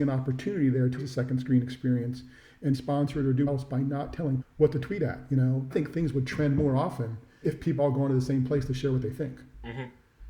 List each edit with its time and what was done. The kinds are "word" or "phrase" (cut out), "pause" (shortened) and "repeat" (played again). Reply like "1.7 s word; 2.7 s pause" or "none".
1.0 s word; 2.7 s word; 3.5 s word; 4.4 s word; 5.7 s phrase; 7.4 s word; 7.8 s word